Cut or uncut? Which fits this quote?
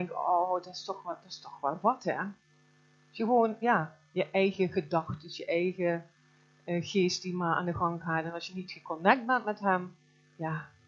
uncut